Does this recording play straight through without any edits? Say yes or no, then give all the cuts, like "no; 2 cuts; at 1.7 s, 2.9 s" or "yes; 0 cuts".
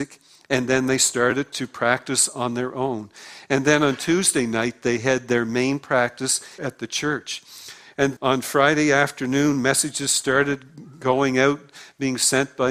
no; 2 cuts; at 6.6 s, 8.2 s